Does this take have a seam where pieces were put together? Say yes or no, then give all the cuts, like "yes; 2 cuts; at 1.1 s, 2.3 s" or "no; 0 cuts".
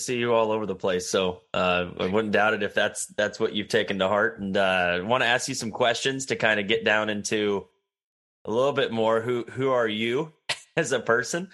no; 0 cuts